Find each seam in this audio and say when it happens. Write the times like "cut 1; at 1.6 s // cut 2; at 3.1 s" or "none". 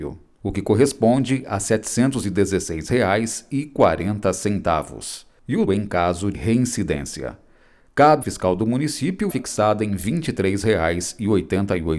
cut 1; at 5.7 s // cut 2; at 6.3 s // cut 3; at 8.2 s // cut 4; at 9.3 s